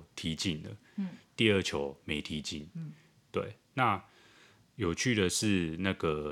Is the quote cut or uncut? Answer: uncut